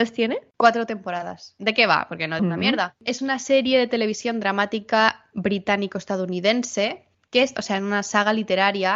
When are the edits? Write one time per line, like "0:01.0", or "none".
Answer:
0:02.4
0:07.1
0:07.6